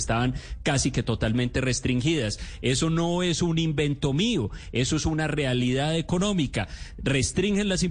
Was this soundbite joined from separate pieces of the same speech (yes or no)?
no